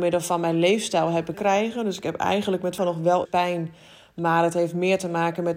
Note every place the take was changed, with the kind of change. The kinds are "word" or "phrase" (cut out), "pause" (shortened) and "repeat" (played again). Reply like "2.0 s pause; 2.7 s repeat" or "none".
1.3 s phrase; 2.8 s word; 3.2 s word